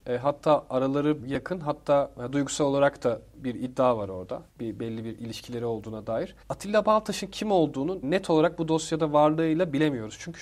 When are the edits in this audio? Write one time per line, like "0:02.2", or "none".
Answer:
0:01.2
0:04.5
0:06.4
0:08.0